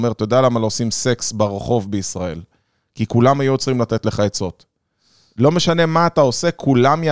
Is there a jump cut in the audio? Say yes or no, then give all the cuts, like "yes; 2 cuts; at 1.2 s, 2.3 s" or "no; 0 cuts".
no; 0 cuts